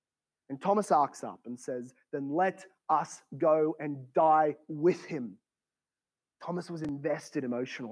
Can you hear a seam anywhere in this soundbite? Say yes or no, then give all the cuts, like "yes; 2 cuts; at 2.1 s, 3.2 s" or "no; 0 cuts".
no; 0 cuts